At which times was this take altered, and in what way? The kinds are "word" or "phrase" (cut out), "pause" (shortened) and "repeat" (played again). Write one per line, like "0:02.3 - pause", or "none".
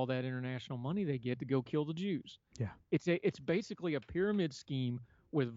0:02.5 - pause